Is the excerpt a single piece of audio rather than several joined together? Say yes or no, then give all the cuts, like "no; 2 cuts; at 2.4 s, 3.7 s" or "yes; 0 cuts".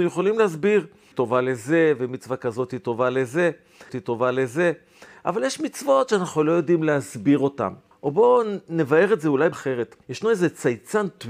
no; 5 cuts; at 1.1 s, 3.9 s, 7.9 s, 9.5 s, 10.0 s